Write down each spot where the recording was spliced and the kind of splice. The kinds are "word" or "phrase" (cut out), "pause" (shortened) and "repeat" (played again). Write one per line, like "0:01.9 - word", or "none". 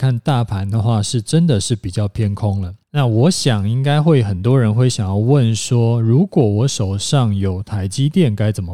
0:02.8 - pause

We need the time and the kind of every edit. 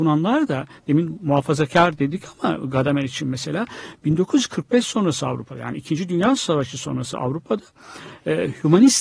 none

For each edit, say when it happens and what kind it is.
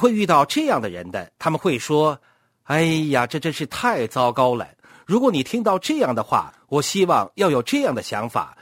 0:01.3 - pause
0:02.2 - pause

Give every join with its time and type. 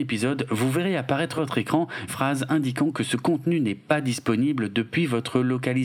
0:01.4 - word
0:02.1 - word

